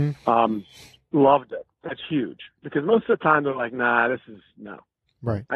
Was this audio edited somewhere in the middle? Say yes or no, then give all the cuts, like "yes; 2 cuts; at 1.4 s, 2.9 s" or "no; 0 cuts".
yes; 1 cut; at 2.5 s